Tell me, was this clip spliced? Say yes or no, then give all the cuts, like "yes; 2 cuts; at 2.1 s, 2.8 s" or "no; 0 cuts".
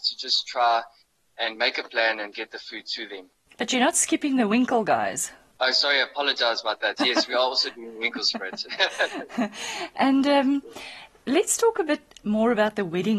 no; 0 cuts